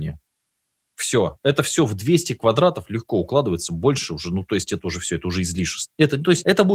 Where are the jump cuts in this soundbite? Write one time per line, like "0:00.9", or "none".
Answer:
none